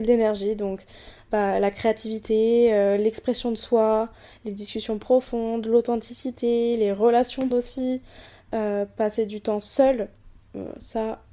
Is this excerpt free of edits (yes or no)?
no